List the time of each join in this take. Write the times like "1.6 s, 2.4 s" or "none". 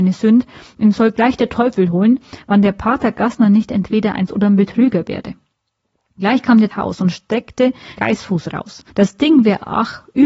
4.3 s, 6.7 s, 8.0 s, 8.9 s